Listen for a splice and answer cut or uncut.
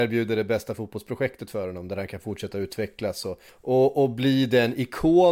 cut